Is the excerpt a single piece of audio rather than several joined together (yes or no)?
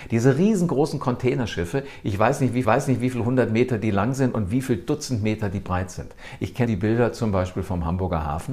no